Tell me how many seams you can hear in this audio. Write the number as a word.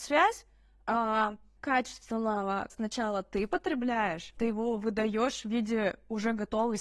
three